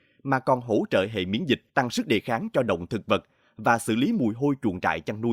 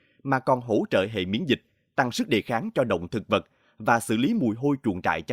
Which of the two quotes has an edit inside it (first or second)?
first